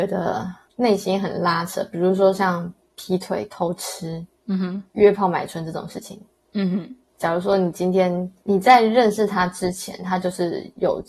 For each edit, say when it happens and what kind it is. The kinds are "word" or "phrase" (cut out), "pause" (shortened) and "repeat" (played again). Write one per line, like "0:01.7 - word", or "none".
0:07.1 - word